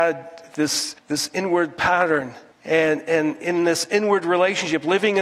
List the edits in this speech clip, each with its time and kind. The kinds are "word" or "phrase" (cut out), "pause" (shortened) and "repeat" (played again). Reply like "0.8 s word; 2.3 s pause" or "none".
1.0 s pause; 2.5 s pause